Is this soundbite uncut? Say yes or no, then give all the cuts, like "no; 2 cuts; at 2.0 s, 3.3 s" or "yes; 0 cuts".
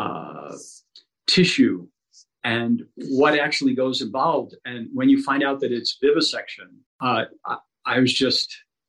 yes; 0 cuts